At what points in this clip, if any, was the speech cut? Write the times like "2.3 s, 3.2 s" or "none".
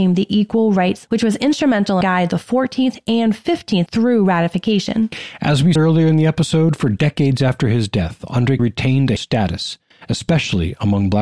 1.1 s, 2.0 s, 3.9 s, 5.8 s, 8.6 s, 9.2 s